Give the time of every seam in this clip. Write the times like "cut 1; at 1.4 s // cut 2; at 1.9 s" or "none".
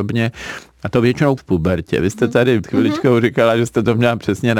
cut 1; at 1.4 s // cut 2; at 2.6 s